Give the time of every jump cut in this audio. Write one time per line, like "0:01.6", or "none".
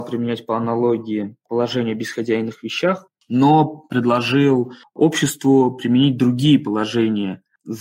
none